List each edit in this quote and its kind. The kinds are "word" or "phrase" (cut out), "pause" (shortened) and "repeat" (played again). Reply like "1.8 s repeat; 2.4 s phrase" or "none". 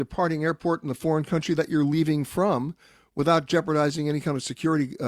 none